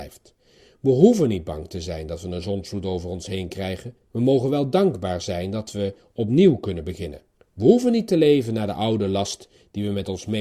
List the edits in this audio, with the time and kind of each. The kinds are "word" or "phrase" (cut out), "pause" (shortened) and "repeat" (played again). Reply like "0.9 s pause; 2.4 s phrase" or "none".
4.0 s pause; 7.4 s pause